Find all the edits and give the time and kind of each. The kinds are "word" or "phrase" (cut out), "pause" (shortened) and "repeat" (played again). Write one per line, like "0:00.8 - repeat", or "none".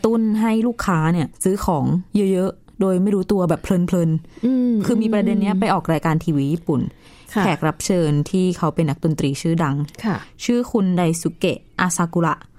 0:01.3 - pause
0:02.1 - pause